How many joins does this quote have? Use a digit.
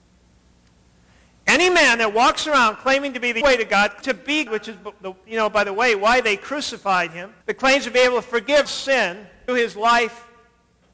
6